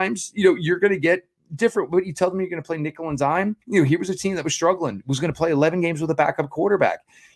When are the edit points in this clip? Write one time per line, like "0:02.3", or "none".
0:03.6